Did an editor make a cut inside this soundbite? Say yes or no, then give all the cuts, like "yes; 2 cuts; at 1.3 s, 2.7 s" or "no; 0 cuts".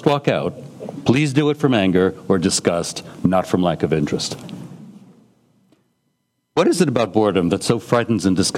no; 0 cuts